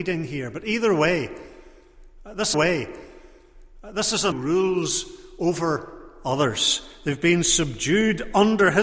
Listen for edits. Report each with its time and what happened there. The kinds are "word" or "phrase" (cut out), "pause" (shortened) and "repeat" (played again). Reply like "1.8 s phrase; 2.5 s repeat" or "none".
2.5 s repeat; 4.3 s phrase